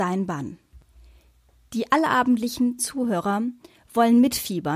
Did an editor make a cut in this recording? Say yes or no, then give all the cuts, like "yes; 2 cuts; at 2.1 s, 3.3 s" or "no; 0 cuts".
yes; 1 cut; at 2.8 s